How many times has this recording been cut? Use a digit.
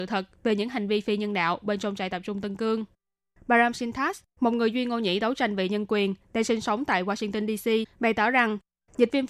0